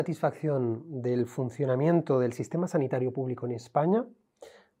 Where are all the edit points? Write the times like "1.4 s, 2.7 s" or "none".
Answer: none